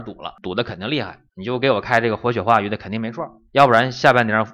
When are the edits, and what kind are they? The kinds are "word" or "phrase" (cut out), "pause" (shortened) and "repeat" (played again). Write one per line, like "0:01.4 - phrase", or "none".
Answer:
0:01.3 - pause
0:03.5 - pause